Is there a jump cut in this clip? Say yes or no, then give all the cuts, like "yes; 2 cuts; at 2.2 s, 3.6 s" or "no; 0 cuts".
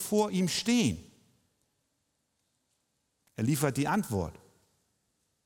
no; 0 cuts